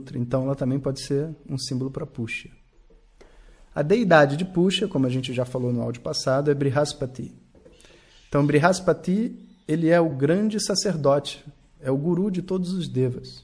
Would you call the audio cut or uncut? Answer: uncut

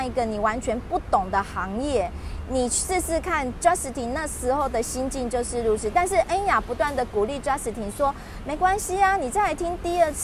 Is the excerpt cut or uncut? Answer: uncut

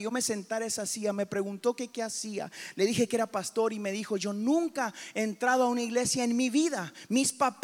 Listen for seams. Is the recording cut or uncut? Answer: uncut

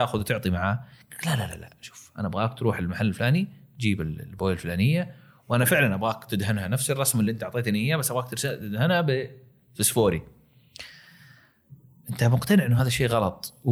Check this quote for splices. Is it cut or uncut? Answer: uncut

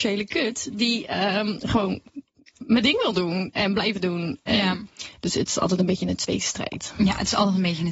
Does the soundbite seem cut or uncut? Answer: uncut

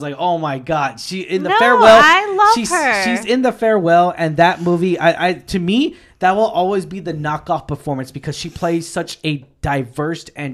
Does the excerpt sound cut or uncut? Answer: uncut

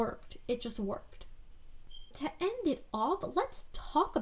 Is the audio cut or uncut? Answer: cut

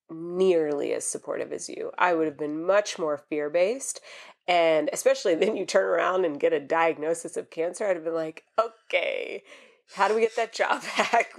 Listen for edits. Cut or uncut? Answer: uncut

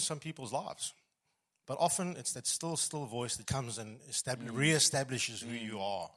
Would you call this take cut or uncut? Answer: cut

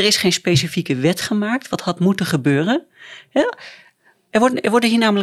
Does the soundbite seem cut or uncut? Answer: uncut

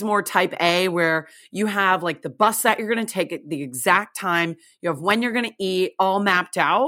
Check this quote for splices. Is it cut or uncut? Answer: uncut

